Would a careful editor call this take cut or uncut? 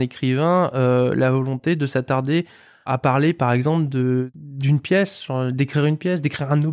uncut